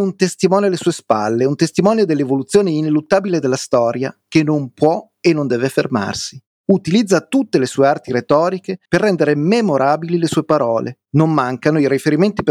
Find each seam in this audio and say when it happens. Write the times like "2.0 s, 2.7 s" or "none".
6.5 s, 8.9 s, 11.1 s